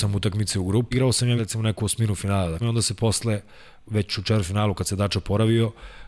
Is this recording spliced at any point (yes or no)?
yes